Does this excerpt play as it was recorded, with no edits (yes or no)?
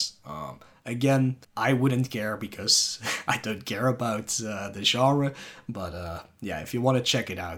no